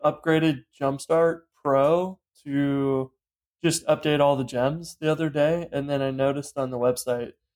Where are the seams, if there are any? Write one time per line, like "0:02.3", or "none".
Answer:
none